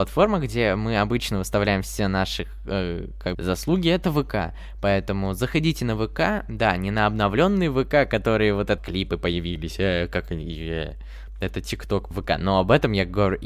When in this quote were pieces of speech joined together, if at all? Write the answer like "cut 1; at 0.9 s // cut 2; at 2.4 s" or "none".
cut 1; at 3.3 s // cut 2; at 8.8 s // cut 3; at 12.1 s